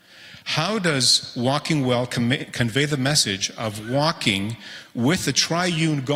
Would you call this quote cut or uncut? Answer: uncut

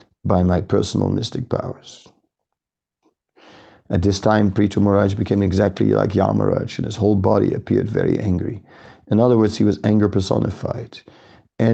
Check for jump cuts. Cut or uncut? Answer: uncut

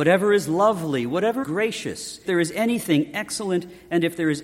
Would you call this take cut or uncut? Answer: cut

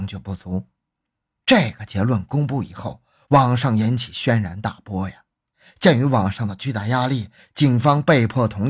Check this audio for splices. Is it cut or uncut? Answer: uncut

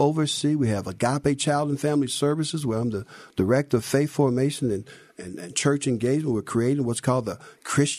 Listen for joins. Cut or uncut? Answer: uncut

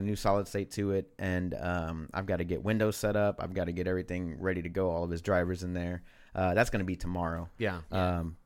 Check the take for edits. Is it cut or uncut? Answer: uncut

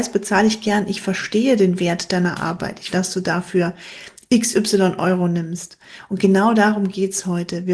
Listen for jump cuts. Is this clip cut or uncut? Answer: cut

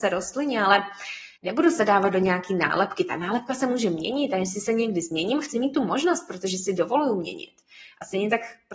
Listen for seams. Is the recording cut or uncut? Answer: cut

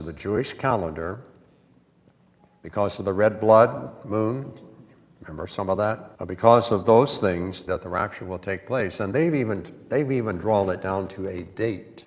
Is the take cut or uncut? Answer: cut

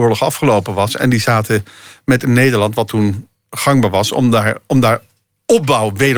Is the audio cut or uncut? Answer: uncut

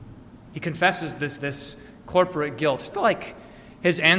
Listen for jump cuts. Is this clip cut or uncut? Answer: cut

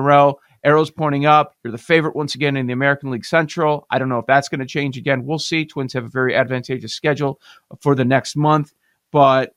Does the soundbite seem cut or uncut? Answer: uncut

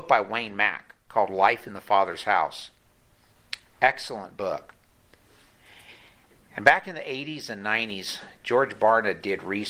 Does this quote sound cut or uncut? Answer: uncut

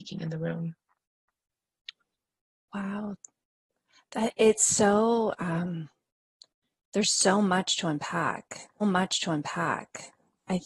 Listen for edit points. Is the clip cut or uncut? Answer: cut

